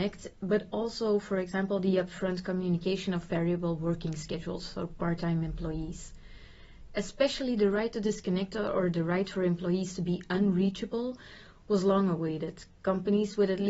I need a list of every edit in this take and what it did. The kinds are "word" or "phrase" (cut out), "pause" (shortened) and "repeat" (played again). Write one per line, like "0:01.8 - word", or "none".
none